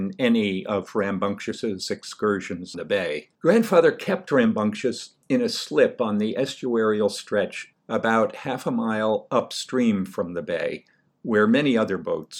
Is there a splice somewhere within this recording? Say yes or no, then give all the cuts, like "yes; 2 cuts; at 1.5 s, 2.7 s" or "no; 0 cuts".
yes; 4 cuts; at 2.7 s, 3.3 s, 5.2 s, 7.7 s